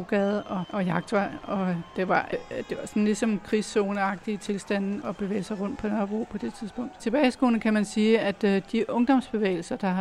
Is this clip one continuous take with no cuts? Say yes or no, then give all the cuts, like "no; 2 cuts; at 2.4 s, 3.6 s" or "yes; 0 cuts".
no; 2 cuts; at 2.3 s, 5.0 s